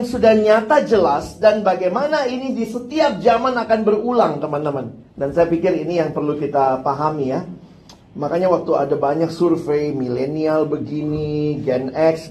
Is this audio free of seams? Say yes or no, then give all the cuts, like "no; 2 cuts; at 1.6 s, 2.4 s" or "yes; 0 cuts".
no; 1 cut; at 5.1 s